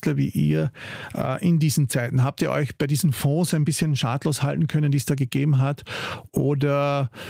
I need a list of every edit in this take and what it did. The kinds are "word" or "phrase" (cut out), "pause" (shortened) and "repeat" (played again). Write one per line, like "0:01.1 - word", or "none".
none